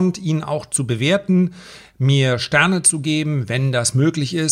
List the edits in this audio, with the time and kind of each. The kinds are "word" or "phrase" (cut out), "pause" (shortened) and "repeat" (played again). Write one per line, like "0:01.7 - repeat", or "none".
none